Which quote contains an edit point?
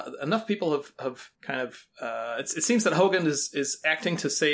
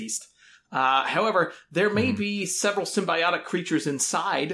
first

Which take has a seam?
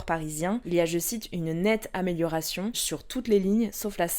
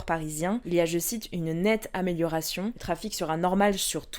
first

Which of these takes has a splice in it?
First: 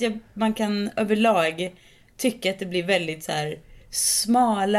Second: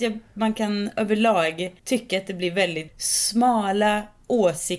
second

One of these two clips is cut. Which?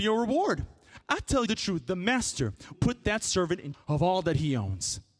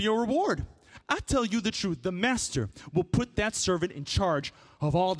first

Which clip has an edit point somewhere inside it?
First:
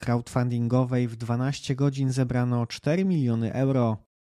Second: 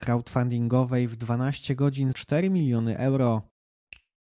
second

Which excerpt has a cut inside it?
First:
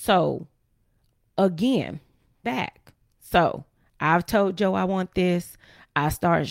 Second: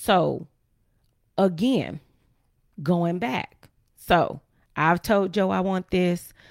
first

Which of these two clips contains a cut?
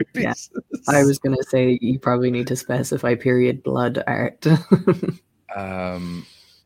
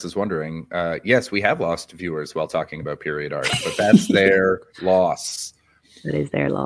second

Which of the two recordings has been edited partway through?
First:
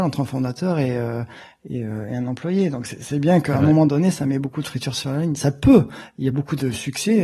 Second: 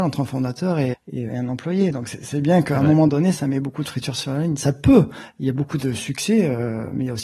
second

